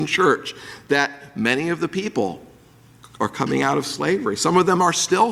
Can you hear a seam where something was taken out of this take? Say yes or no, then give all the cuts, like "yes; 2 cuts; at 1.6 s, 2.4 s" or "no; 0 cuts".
no; 0 cuts